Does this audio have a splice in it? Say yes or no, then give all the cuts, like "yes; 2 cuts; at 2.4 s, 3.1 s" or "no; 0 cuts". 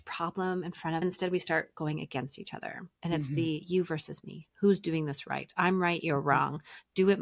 yes; 2 cuts; at 1.0 s, 3.0 s